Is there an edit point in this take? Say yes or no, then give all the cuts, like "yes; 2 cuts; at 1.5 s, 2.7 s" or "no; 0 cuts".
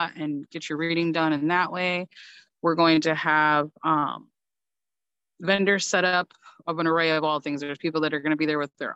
no; 0 cuts